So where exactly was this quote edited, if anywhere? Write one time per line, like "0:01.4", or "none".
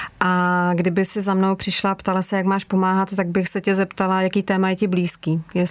none